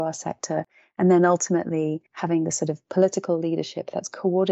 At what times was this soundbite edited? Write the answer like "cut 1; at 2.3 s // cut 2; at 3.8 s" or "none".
cut 1; at 2.1 s